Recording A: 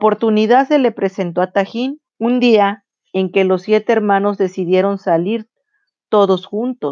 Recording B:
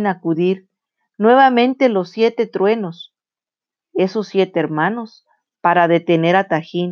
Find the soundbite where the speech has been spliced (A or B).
A